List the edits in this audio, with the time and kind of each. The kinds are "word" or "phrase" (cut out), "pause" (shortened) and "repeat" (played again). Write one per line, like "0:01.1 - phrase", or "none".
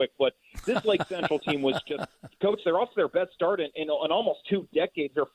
none